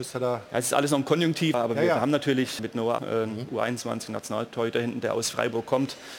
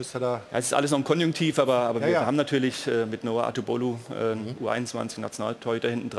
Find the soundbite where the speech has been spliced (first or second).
first